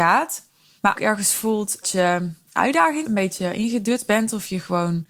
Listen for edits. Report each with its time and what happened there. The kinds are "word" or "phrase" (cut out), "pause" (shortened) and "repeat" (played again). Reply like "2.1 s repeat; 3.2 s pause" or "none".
0.9 s word; 1.8 s word; 3.0 s word